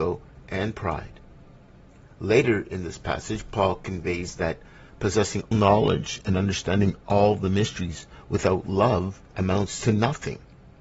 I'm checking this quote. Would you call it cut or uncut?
cut